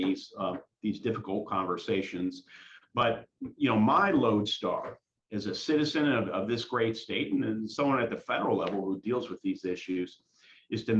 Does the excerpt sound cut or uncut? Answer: uncut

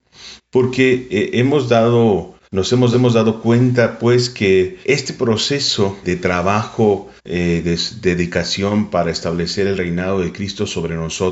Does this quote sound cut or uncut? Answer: cut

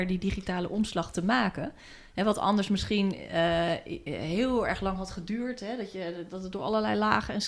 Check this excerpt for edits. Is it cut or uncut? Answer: uncut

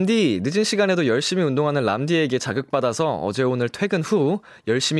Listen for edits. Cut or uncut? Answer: uncut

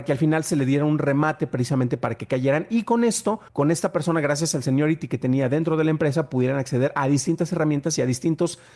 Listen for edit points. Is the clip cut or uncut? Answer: cut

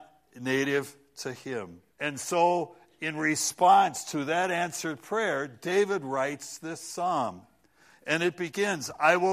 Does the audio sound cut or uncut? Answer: cut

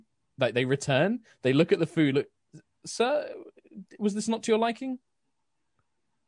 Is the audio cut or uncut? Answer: uncut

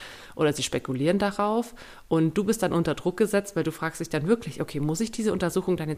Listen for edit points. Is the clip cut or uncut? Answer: uncut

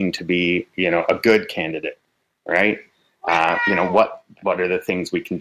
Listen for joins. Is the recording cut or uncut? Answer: uncut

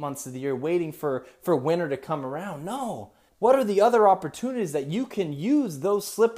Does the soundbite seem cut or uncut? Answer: cut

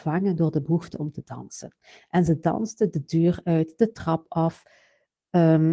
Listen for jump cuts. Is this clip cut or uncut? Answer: uncut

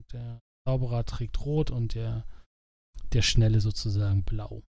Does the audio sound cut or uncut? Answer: uncut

